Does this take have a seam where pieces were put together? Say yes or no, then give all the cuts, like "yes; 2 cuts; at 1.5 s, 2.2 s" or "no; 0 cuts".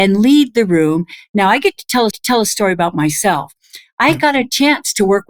yes; 1 cut; at 2.1 s